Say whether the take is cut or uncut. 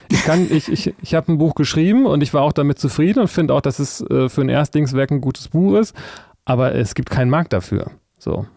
uncut